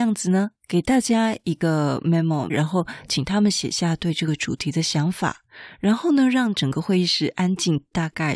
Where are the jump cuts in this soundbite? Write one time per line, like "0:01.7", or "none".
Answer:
0:02.5